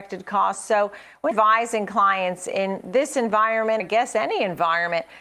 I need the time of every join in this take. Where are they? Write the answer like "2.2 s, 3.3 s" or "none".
1.3 s, 3.8 s